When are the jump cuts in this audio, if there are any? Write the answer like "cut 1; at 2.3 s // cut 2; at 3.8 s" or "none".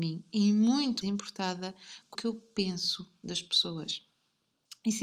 cut 1; at 1.0 s // cut 2; at 2.1 s